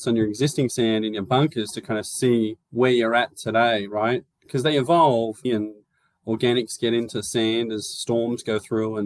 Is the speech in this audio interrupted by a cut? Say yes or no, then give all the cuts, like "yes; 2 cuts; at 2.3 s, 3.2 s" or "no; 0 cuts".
yes; 3 cuts; at 2.6 s, 4.3 s, 5.4 s